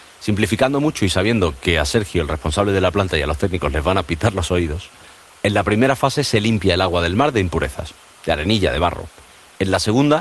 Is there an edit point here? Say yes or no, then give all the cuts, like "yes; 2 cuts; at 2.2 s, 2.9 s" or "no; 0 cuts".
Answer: no; 0 cuts